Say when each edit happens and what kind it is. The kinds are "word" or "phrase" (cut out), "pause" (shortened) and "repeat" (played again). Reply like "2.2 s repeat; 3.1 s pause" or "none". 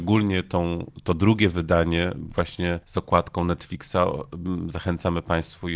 2.8 s pause